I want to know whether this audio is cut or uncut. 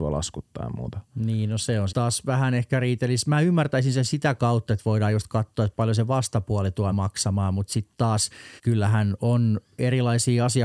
cut